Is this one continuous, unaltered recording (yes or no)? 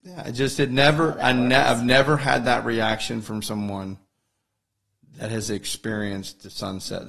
yes